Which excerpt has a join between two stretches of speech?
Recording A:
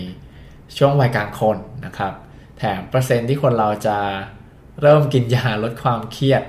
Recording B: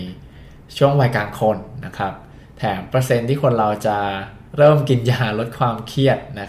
B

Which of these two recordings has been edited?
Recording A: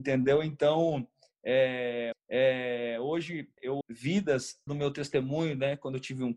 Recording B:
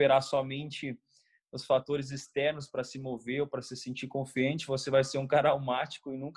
A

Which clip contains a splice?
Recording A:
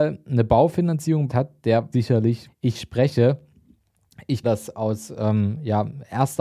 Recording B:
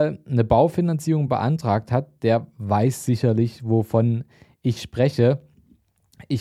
A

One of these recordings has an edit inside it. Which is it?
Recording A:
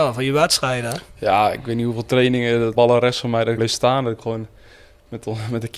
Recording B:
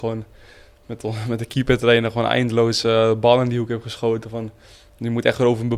A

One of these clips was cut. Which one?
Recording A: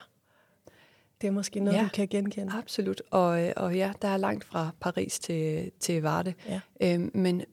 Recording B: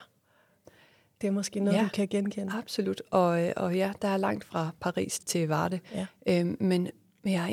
B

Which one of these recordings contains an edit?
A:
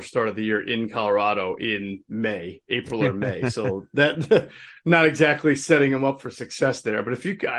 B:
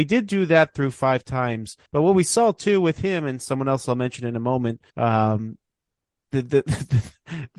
B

